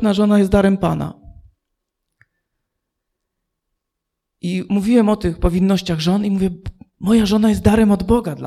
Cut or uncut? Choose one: uncut